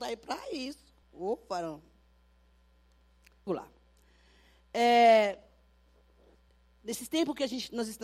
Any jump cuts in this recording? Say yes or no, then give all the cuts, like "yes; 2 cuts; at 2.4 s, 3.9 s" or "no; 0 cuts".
yes; 3 cuts; at 1.0 s, 3.5 s, 6.5 s